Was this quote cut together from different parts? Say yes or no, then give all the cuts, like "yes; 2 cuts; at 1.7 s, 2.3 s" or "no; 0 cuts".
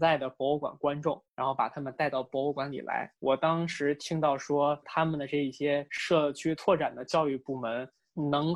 yes; 1 cut; at 3.2 s